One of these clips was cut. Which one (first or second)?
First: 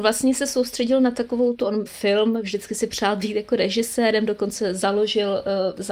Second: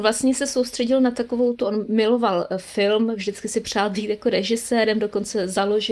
first